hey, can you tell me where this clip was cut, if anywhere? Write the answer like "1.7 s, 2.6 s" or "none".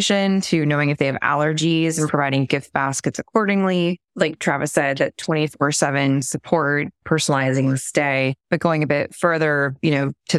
4.1 s, 8.4 s